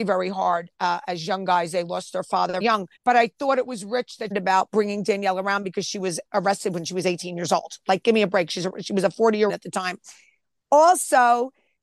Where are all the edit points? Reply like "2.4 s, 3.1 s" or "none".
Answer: 2.6 s, 3.0 s, 4.3 s, 6.3 s, 9.5 s

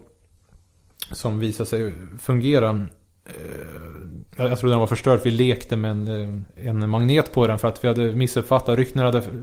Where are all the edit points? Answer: 4.3 s, 6.5 s

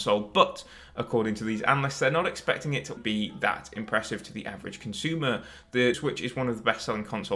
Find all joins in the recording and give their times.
3.0 s, 5.9 s

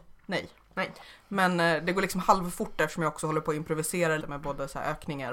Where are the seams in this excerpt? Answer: 4.2 s

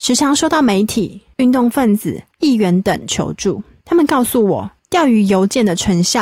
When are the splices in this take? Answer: 2.3 s

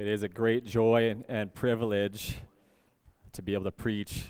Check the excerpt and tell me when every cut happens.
none

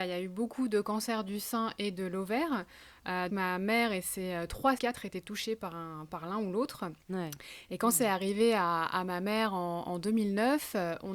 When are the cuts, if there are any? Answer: 3.3 s, 4.8 s, 7.0 s

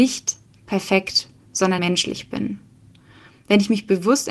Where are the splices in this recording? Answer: 1.8 s

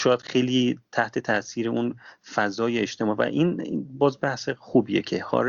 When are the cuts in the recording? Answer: none

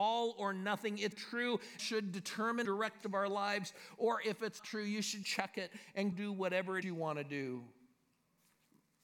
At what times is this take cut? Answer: 1.1 s, 1.8 s, 2.6 s, 3.0 s, 4.6 s, 5.2 s, 6.1 s, 6.8 s

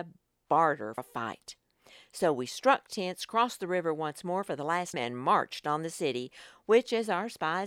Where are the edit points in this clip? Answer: 1.0 s, 4.9 s

